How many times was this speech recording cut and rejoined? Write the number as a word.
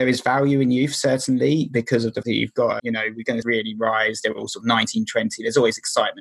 three